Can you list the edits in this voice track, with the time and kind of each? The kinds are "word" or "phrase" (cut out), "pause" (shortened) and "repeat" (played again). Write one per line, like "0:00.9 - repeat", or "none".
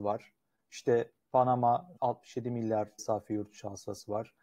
0:02.0 - word
0:03.0 - phrase

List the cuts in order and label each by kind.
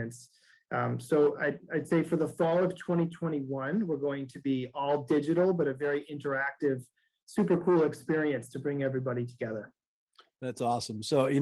none

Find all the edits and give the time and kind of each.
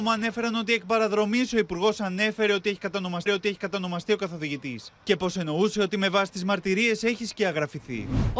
0:03.3 - repeat

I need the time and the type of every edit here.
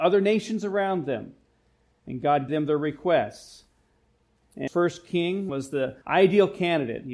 0:02.5 - word
0:04.7 - word
0:05.5 - phrase
0:06.0 - pause

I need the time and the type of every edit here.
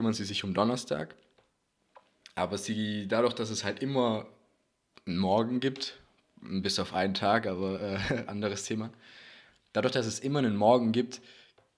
none

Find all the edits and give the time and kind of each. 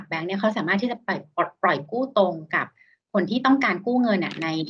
none

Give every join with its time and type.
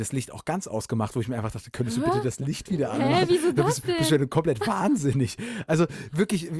none

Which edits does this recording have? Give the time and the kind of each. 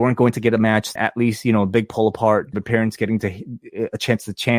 0:01.0 - word
0:02.5 - phrase

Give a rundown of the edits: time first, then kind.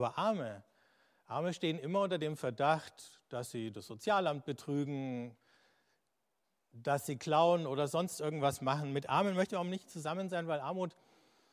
none

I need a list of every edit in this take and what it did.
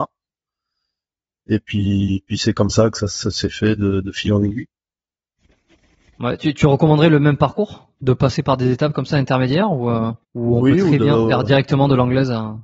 0:10.2 - pause

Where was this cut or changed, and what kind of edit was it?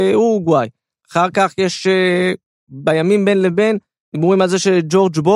none

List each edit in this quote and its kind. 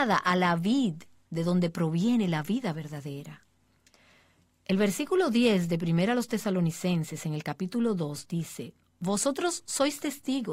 none

